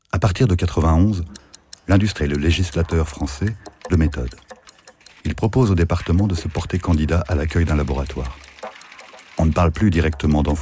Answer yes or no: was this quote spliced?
yes